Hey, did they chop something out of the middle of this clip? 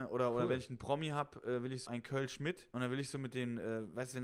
yes; 2 cuts; at 1.9 s, 2.7 s

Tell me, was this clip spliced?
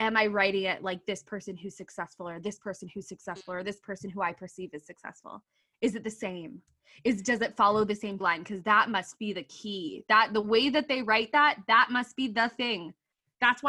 yes; 1 cut; at 8.2 s

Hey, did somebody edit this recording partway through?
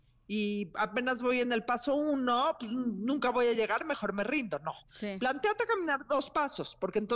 no; 0 cuts

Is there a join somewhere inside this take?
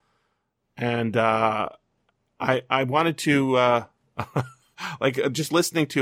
no; 0 cuts

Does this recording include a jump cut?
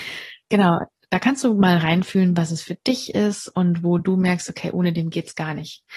no; 0 cuts

